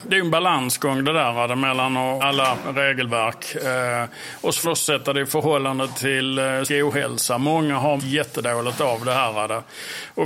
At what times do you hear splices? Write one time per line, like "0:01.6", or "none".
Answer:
0:02.2
0:04.6
0:06.7
0:08.0